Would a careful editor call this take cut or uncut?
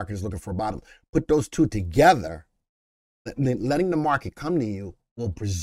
uncut